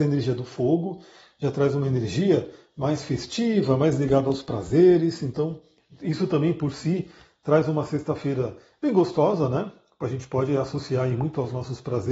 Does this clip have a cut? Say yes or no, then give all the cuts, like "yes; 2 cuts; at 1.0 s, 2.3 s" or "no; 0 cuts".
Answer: no; 0 cuts